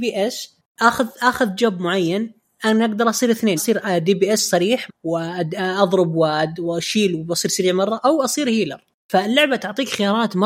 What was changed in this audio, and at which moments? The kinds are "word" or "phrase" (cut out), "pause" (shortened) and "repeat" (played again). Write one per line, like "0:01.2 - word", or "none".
0:03.6 - word
0:04.9 - word